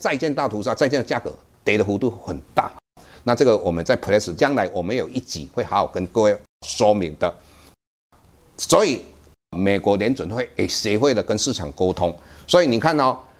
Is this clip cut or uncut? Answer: cut